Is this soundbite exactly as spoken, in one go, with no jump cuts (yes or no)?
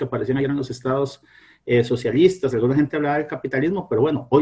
yes